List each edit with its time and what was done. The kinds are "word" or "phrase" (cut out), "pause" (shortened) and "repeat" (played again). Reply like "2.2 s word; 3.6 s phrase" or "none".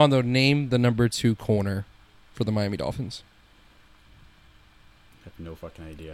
none